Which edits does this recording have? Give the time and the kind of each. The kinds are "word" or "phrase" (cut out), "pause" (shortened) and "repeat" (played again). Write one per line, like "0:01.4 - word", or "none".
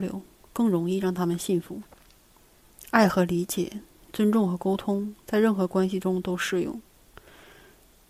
none